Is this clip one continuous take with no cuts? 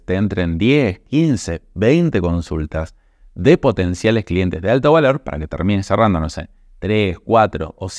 yes; 0 cuts

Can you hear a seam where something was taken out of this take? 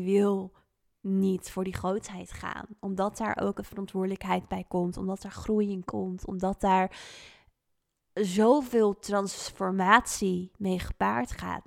no; 0 cuts

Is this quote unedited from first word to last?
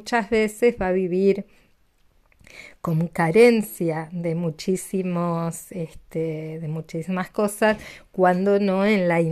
yes; 0 cuts

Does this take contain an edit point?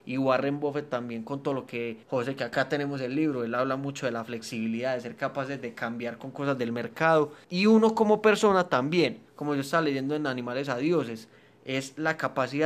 yes; 3 cuts; at 2.0 s, 7.4 s, 9.3 s

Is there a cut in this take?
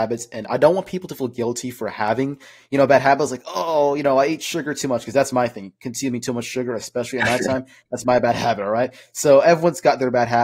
no; 0 cuts

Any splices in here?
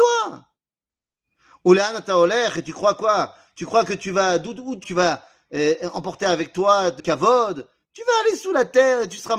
yes; 2 cuts; at 4.8 s, 7.0 s

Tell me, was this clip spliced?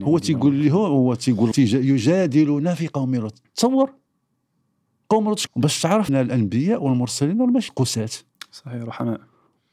yes; 4 cuts; at 1.5 s, 5.5 s, 6.1 s, 7.7 s

